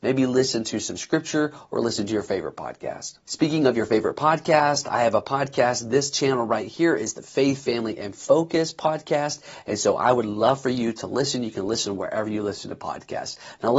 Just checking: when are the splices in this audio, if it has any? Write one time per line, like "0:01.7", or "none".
0:03.2